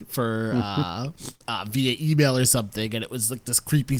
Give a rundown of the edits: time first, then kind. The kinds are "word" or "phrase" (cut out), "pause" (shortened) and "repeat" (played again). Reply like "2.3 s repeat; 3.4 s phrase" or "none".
1.4 s pause